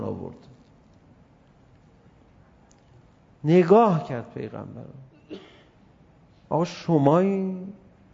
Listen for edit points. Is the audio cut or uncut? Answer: uncut